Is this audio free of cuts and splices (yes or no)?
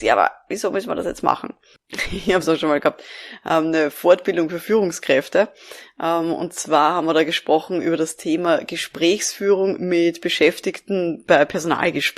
no